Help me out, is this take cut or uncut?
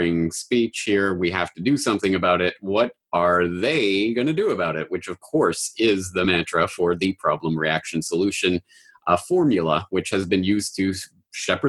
uncut